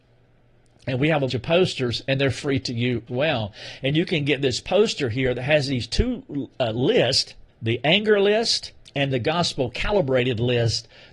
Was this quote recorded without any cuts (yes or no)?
no